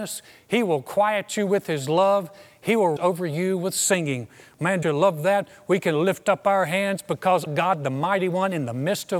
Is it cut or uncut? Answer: cut